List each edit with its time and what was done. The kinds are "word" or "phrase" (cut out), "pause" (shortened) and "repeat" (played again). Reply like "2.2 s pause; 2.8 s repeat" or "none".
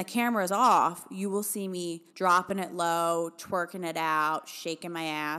2.1 s pause